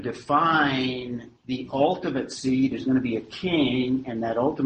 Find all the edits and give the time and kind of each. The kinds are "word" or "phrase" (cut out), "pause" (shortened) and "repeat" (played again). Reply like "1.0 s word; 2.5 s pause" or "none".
1.4 s pause